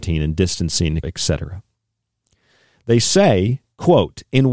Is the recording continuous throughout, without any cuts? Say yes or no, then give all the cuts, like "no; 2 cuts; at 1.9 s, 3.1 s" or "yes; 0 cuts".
no; 1 cut; at 1.0 s